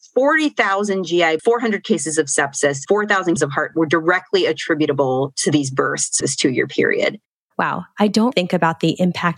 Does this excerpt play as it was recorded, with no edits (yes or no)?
no